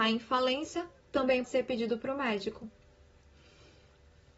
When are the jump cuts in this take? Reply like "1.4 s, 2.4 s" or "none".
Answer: 1.4 s